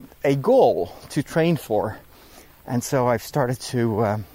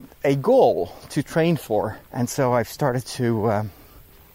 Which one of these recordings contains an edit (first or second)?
second